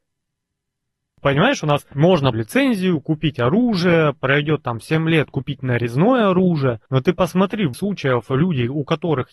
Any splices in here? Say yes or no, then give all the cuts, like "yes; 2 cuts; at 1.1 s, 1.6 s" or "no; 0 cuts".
yes; 3 cuts; at 2.3 s, 6.9 s, 7.7 s